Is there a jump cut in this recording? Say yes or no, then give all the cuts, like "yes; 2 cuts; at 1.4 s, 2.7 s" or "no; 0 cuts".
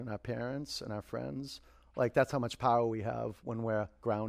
no; 0 cuts